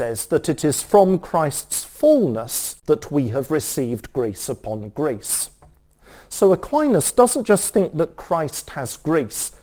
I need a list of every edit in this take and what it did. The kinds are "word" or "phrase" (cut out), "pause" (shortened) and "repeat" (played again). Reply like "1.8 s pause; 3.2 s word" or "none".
2.8 s pause